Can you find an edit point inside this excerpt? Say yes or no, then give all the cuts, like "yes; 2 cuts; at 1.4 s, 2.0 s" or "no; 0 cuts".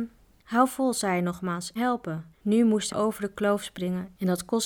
yes; 3 cuts; at 1.8 s, 2.3 s, 2.9 s